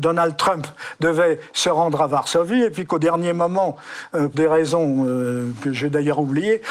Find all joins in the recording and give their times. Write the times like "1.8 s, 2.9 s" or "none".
4.3 s